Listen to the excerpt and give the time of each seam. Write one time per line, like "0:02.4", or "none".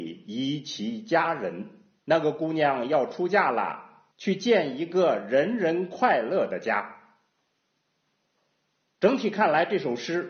0:02.0
0:04.1